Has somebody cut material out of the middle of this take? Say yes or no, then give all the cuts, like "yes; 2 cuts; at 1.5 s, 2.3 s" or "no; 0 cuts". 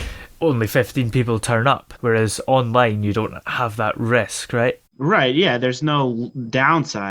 yes; 1 cut; at 4.9 s